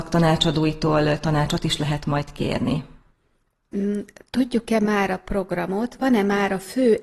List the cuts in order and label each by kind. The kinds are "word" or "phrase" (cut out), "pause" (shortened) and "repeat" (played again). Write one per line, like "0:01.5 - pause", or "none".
none